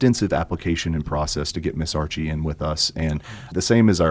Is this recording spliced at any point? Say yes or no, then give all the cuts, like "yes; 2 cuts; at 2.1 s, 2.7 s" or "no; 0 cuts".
yes; 1 cut; at 1.0 s